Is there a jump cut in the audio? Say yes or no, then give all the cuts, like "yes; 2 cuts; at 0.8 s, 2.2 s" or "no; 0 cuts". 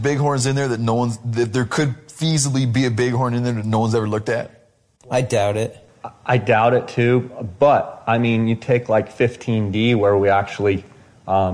no; 0 cuts